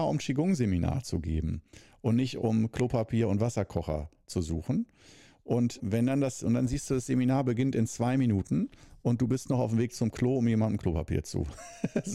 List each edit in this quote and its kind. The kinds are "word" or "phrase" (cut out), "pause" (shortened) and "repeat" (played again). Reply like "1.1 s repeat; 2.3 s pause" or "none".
5.8 s word